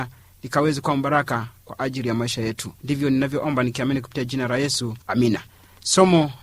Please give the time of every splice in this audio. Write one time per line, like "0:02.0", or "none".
0:02.8
0:05.0